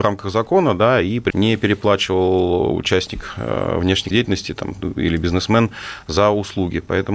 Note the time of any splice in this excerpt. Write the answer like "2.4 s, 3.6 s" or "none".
1.3 s, 4.1 s